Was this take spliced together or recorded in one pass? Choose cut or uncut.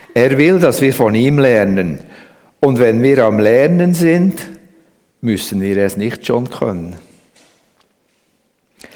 uncut